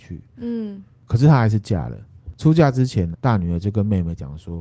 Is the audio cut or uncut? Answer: cut